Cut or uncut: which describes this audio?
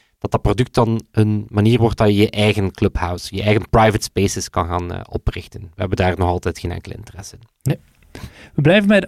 uncut